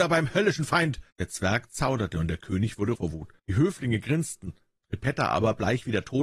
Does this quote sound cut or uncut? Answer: cut